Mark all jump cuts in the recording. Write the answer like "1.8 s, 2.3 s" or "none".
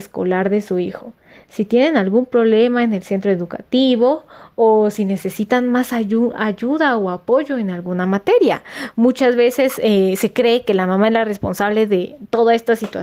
none